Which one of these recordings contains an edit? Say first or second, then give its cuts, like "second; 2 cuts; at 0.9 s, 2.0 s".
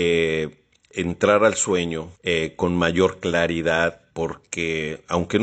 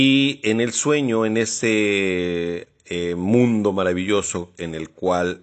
first; 2 cuts; at 2.2 s, 4.1 s